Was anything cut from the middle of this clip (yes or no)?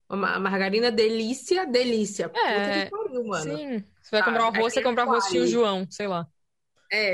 no